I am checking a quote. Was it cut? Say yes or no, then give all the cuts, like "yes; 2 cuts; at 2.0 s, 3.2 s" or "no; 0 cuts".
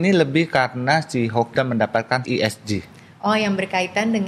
yes; 2 cuts; at 1.5 s, 2.2 s